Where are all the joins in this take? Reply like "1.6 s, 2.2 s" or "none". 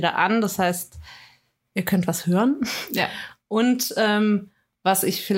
1.6 s

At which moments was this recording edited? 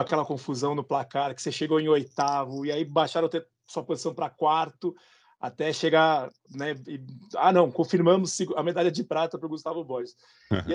6.4 s

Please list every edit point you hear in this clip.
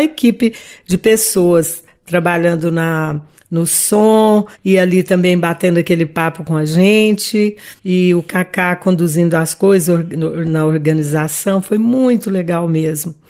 7.8 s

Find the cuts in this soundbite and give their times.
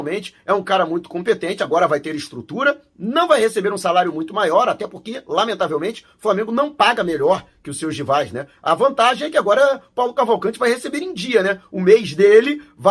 none

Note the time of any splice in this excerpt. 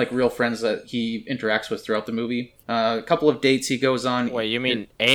2.6 s

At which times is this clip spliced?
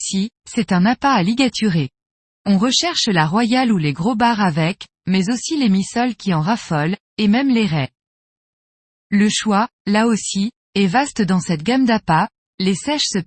none

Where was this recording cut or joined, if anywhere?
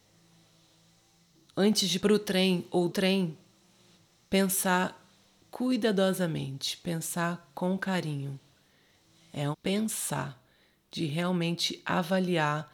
2.0 s, 2.9 s, 3.9 s, 9.5 s

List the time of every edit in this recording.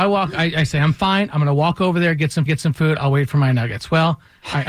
2.5 s

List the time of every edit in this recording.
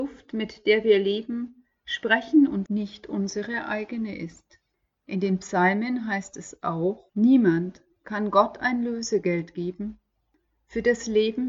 2.7 s, 4.7 s, 7.1 s

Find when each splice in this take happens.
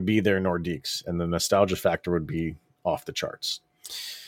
none

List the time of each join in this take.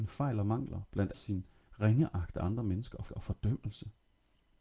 1.1 s, 3.1 s

